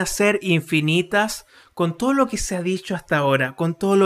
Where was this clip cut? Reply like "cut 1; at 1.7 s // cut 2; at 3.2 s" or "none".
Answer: none

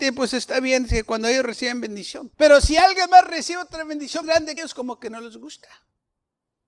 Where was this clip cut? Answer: cut 1; at 2.3 s // cut 2; at 4.2 s // cut 3; at 4.6 s

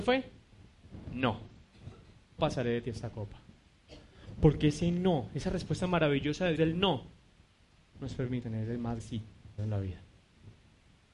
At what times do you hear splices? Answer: cut 1; at 2.4 s // cut 2; at 6.5 s // cut 3; at 8.4 s // cut 4; at 9.0 s // cut 5; at 9.6 s

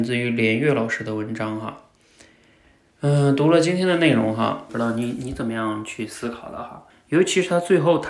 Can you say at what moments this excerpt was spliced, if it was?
cut 1; at 4.7 s // cut 2; at 6.9 s

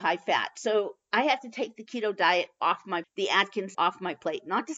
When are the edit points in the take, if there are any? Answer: cut 1; at 3.0 s // cut 2; at 3.7 s

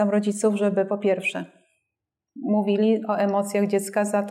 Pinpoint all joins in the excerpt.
none

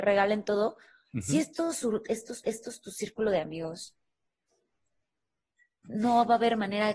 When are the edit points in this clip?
cut 1; at 2.4 s

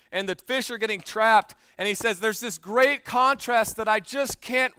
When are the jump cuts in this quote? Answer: none

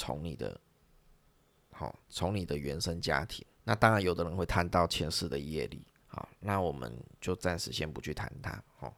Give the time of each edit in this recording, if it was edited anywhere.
cut 1; at 2.0 s // cut 2; at 3.5 s // cut 3; at 6.0 s

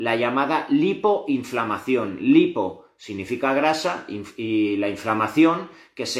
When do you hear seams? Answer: none

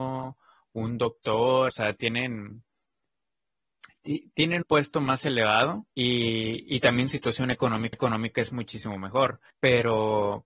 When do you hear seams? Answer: cut 1; at 1.7 s // cut 2; at 4.6 s // cut 3; at 5.9 s // cut 4; at 7.1 s // cut 5; at 7.9 s // cut 6; at 9.5 s

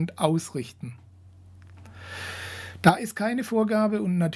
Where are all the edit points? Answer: none

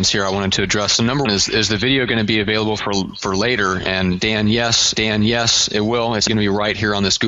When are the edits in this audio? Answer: cut 1; at 1.2 s // cut 2; at 4.9 s // cut 3; at 6.3 s

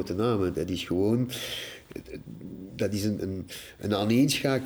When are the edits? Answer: cut 1; at 3.2 s

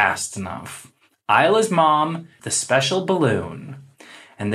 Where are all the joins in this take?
cut 1; at 2.4 s

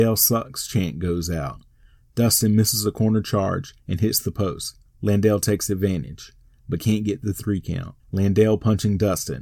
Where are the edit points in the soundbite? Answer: cut 1; at 3.8 s // cut 2; at 4.9 s // cut 3; at 8.0 s

